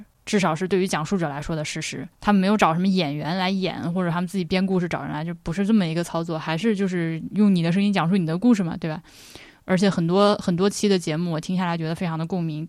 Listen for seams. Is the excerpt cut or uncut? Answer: cut